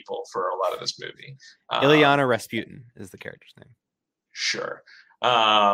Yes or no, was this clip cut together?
no